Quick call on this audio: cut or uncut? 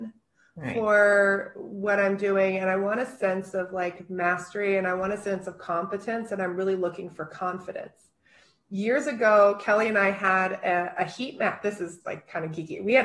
uncut